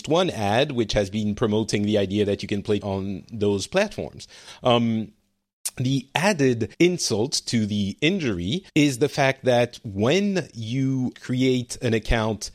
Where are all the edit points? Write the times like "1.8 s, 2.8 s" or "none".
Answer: 2.8 s, 6.7 s, 8.7 s, 11.1 s